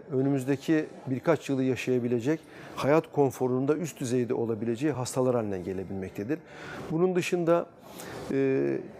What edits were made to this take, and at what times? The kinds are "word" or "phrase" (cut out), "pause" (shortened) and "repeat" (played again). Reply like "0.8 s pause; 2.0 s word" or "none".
none